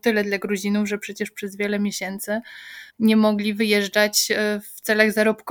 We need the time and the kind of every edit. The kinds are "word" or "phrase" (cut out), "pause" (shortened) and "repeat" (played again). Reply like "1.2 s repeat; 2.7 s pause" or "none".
2.9 s pause